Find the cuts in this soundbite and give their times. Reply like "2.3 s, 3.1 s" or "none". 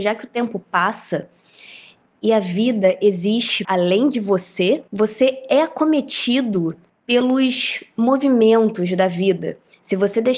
3.6 s, 4.9 s, 6.9 s

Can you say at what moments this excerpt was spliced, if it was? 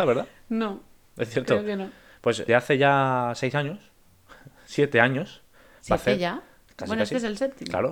2.5 s

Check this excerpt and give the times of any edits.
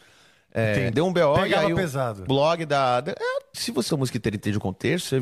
0.9 s, 2.3 s, 3.5 s, 3.9 s

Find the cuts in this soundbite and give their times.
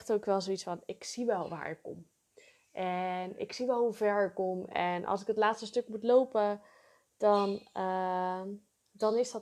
none

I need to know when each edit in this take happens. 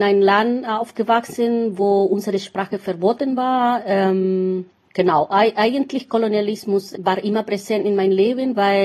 none

